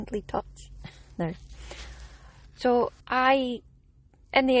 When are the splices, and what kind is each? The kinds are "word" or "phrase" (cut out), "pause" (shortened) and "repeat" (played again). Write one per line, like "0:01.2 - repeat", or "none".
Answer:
0:03.0 - pause